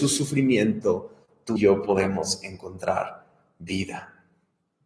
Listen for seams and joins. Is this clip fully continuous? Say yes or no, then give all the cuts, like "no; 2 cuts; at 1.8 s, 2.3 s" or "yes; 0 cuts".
no; 1 cut; at 1.6 s